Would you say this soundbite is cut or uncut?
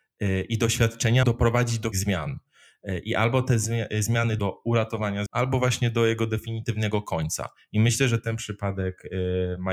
cut